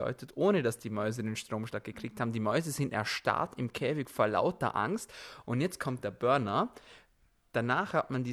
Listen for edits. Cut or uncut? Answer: uncut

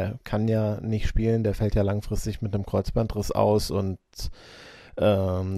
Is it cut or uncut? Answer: uncut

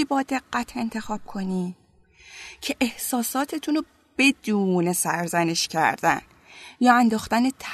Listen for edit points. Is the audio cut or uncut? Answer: uncut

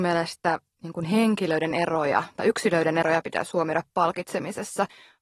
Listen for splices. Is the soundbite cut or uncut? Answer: uncut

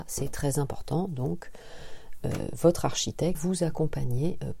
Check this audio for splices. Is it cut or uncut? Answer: cut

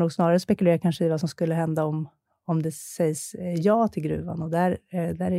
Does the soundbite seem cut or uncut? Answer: uncut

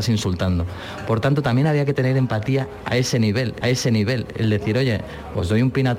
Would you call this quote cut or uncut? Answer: cut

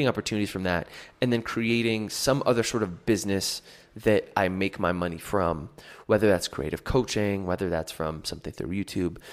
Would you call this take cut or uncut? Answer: uncut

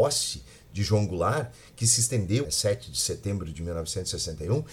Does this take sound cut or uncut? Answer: cut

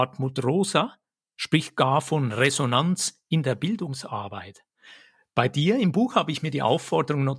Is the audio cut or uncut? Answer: uncut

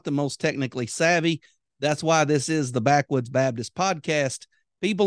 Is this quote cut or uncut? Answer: uncut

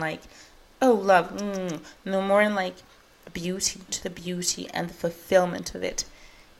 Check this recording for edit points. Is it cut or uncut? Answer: cut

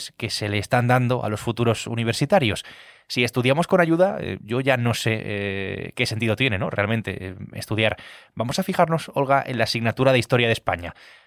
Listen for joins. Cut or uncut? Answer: uncut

